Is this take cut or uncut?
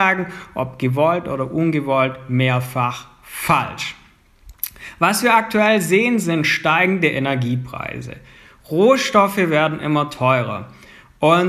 uncut